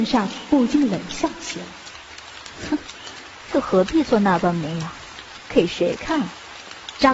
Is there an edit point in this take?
yes; 1 cut; at 3.5 s

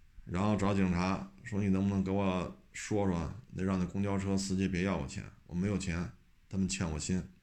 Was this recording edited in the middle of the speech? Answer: no; 0 cuts

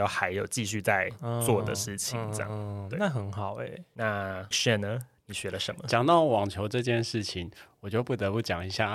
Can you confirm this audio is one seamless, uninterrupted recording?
no; 1 cut; at 4.5 s

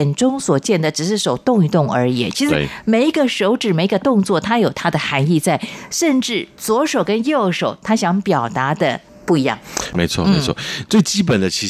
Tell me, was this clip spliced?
yes; 1 cut; at 9.9 s

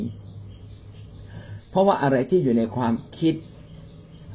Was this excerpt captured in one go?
yes; 0 cuts

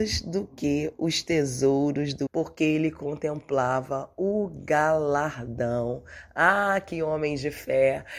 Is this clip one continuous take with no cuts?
no; 1 cut; at 2.3 s

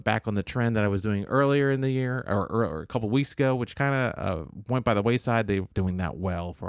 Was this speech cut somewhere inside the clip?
yes; 1 cut; at 5.7 s

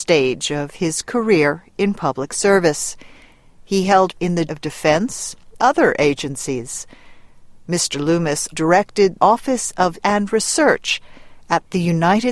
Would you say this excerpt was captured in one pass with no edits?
no; 6 cuts; at 4.1 s, 4.5 s, 5.6 s, 8.5 s, 9.2 s, 10.0 s

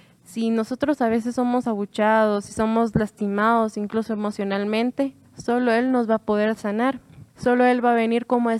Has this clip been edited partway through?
yes; 2 cuts; at 5.2 s, 7.3 s

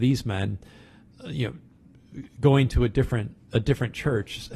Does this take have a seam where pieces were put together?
no; 0 cuts

